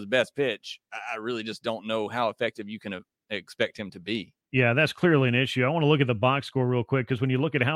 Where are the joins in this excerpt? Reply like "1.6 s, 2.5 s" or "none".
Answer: none